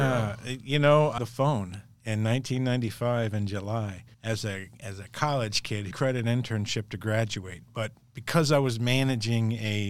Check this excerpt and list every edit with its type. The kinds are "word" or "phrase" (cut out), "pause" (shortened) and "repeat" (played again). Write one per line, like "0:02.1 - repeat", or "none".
0:01.2 - word
0:04.1 - pause
0:05.9 - phrase